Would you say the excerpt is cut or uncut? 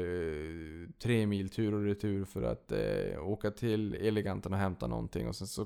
uncut